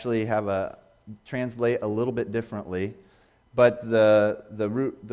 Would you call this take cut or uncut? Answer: uncut